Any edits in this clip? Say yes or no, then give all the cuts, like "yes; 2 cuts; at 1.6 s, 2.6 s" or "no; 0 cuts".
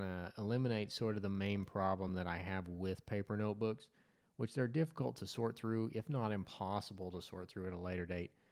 no; 0 cuts